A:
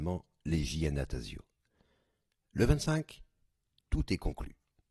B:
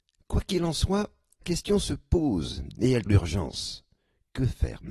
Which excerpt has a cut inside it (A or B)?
B